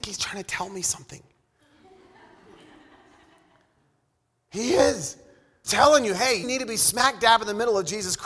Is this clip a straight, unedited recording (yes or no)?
no